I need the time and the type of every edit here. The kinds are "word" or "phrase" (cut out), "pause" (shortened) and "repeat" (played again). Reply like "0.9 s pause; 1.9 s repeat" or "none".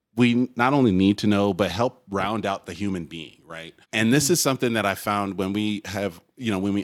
3.8 s pause